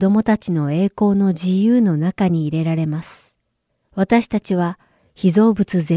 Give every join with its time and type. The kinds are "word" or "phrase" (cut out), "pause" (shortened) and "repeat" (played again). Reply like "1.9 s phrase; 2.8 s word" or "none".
3.7 s pause